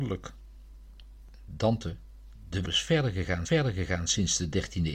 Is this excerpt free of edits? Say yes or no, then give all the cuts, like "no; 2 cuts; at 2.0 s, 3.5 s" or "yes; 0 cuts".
no; 2 cuts; at 2.6 s, 3.4 s